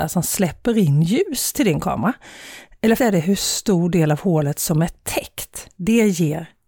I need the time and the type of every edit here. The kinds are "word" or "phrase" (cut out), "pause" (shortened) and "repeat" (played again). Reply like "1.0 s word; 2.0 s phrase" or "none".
3.0 s word